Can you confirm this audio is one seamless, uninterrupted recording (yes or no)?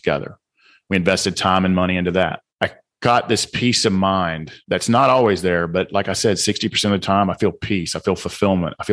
no